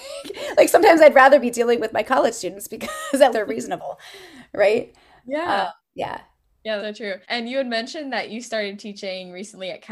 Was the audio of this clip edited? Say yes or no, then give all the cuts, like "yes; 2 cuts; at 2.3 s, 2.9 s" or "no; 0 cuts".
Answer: yes; 4 cuts; at 3.3 s, 5.8 s, 6.8 s, 7.2 s